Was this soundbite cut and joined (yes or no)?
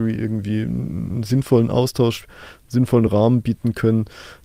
no